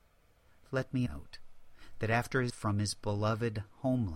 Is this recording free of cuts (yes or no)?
no